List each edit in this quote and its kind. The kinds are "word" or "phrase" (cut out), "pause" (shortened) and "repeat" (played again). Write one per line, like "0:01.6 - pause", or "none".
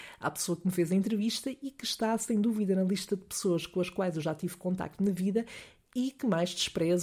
none